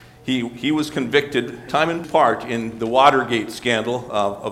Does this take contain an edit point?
yes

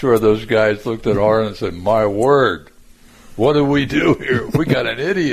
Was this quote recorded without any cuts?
yes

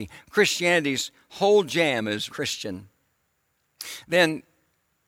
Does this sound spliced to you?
yes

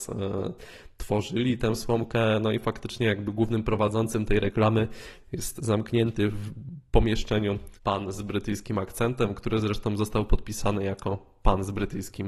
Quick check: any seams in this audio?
yes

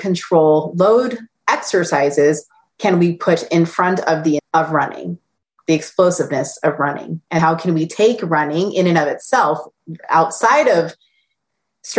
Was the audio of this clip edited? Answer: yes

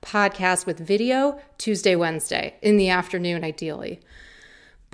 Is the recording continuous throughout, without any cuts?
yes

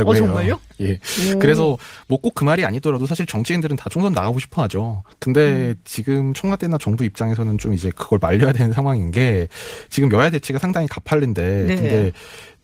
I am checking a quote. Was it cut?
no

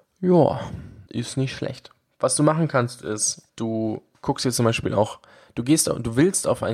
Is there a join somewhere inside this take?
yes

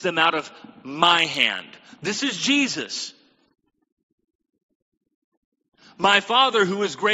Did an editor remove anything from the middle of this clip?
no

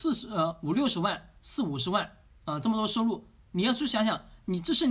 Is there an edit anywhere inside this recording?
no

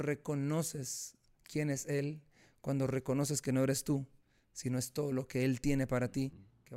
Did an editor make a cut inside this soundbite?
no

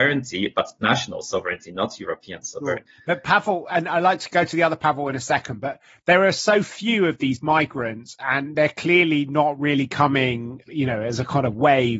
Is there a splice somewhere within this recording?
no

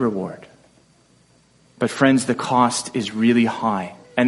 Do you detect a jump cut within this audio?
no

